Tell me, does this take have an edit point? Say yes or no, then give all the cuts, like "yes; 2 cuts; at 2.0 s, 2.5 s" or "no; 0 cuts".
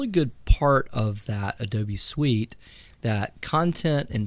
no; 0 cuts